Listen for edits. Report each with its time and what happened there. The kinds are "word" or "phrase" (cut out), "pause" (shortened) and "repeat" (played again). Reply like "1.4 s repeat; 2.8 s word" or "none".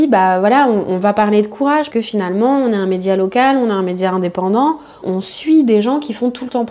1.9 s word; 5.0 s word